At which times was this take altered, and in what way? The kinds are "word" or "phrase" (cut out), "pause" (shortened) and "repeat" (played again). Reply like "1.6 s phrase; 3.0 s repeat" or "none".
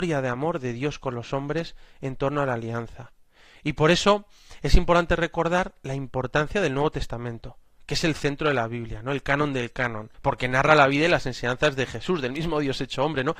10.1 s pause